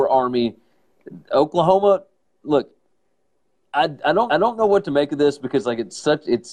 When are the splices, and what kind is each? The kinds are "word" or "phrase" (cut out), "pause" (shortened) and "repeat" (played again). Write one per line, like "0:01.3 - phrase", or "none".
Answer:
0:04.3 - repeat